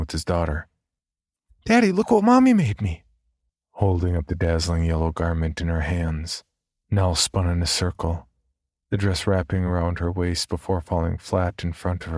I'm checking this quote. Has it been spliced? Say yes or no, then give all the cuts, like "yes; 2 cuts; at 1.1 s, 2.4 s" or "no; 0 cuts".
no; 0 cuts